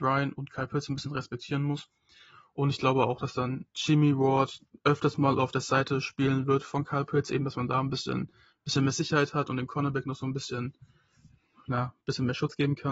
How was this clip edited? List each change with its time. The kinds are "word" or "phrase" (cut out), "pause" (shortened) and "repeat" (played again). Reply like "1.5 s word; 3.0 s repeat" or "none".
none